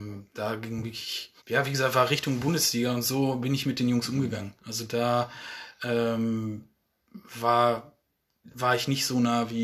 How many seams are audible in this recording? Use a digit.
2